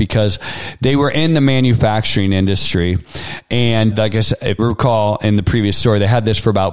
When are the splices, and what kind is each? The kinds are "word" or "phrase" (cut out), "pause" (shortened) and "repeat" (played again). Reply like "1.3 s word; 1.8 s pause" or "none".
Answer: 3.9 s word; 4.6 s word

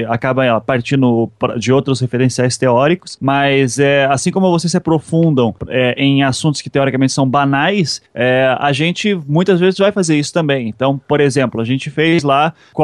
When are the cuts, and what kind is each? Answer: 5.6 s pause; 8.1 s pause

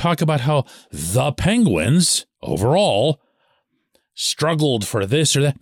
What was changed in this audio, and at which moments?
2.3 s pause

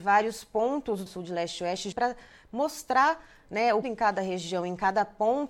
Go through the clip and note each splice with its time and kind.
1.1 s phrase; 1.9 s word; 3.8 s phrase

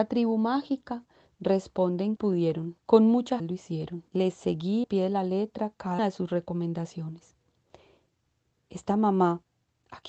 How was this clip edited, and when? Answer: 2.2 s phrase; 2.8 s pause; 3.4 s word; 4.1 s pause; 4.8 s word; 6.0 s word

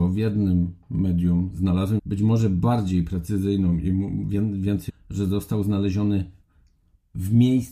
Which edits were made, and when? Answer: 2.0 s word; 4.9 s word

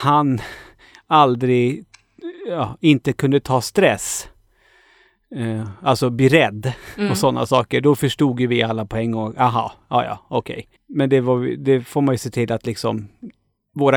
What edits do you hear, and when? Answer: 10.8 s pause

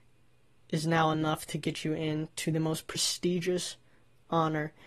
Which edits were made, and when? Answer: none

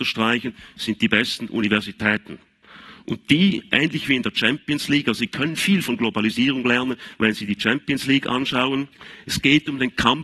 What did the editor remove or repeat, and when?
none

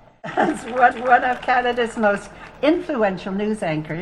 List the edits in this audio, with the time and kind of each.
0.9 s repeat

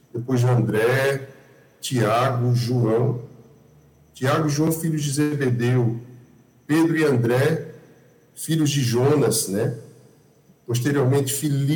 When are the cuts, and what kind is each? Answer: none

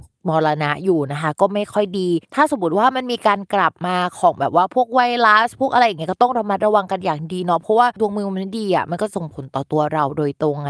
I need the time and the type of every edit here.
2.2 s pause

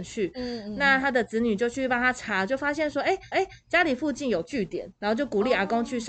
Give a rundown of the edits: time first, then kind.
3.3 s repeat; 5.0 s pause

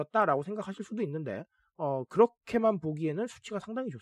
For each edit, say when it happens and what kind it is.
none

